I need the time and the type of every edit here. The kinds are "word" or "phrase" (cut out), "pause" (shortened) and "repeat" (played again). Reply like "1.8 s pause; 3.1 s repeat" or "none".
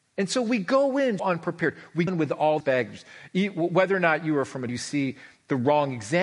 1.2 s word; 2.1 s word; 2.6 s word; 4.7 s phrase